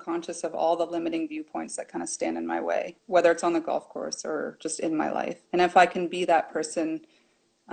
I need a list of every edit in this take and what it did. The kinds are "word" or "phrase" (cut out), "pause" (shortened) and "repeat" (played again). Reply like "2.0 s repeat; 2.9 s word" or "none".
3.0 s pause; 5.5 s pause